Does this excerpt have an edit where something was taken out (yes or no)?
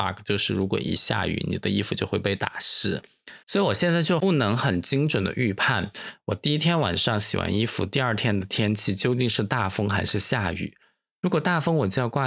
yes